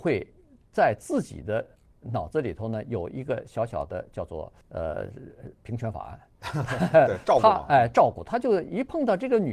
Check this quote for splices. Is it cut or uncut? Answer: cut